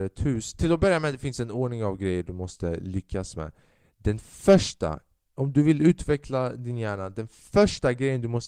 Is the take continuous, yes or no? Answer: yes